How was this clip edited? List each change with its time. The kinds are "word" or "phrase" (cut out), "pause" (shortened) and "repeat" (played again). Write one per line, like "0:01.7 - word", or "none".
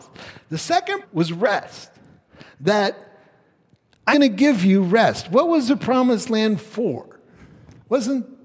0:01.0 - word
0:04.1 - word